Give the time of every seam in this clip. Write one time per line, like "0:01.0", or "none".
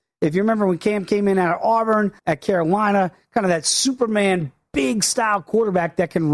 0:02.2